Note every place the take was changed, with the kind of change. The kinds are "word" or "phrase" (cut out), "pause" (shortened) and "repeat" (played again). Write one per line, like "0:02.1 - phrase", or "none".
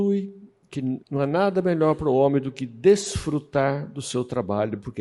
0:01.0 - pause